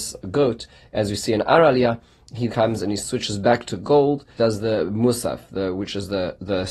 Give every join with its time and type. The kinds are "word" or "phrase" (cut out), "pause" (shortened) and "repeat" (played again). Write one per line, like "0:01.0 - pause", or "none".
0:02.5 - word
0:04.4 - word